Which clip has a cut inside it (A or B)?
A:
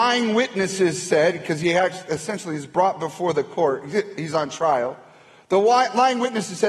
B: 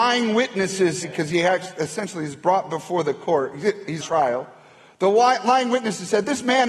B